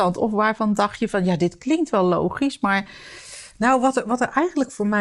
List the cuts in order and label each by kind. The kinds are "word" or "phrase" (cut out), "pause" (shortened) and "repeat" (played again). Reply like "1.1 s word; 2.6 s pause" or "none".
none